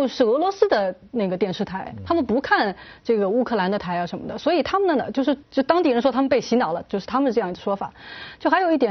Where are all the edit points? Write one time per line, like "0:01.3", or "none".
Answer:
0:05.4